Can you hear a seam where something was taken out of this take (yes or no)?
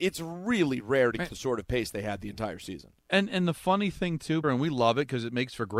yes